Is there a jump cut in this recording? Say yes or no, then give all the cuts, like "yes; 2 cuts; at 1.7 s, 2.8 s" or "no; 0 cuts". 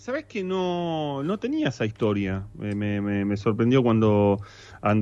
no; 0 cuts